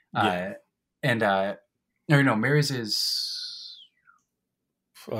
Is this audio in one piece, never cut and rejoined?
yes; 0 cuts

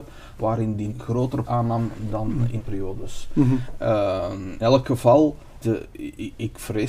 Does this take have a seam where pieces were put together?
yes; 5 cuts; at 0.9 s, 1.4 s, 2.6 s, 4.6 s, 5.6 s

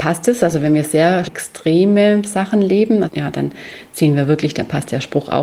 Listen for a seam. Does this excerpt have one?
yes; 2 cuts; at 1.2 s, 3.1 s

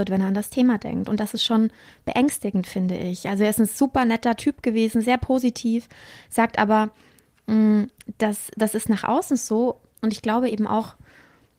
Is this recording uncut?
yes; 0 cuts

